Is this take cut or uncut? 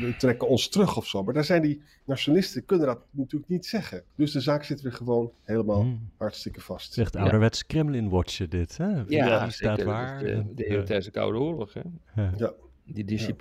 cut